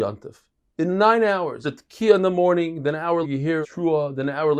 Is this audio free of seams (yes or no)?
no